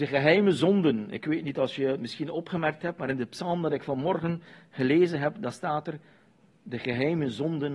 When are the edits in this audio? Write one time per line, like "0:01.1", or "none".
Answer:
none

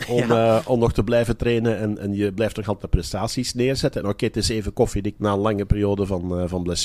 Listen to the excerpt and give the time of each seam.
0:05.1

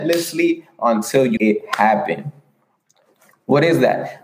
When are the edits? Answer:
0:01.4

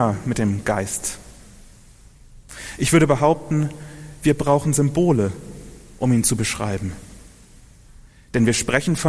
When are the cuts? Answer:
none

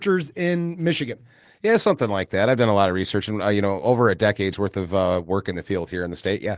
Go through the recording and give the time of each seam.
none

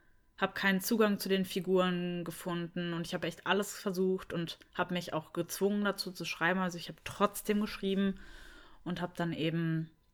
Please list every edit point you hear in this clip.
none

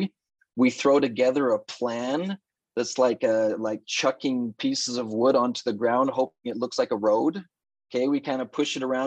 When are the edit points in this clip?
none

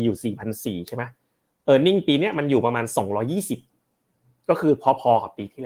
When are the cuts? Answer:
none

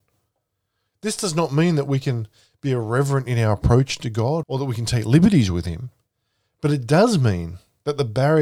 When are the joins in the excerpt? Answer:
0:04.4

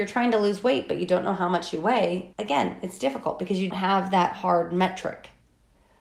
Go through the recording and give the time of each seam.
0:02.3
0:03.7

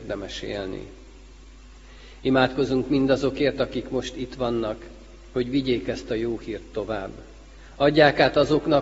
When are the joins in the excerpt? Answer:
none

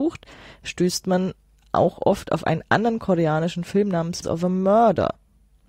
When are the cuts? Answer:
0:04.2

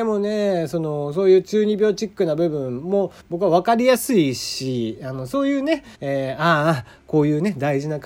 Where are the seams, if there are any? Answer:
0:03.2
0:05.9

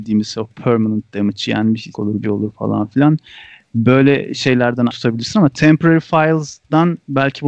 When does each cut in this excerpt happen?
0:01.9
0:02.2
0:04.9

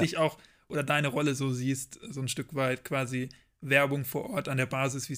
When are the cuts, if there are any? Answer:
none

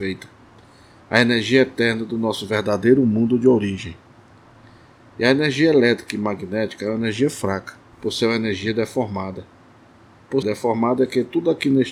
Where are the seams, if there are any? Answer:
0:07.9
0:10.4

